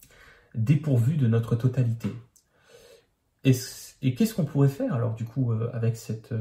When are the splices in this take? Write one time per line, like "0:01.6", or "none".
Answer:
none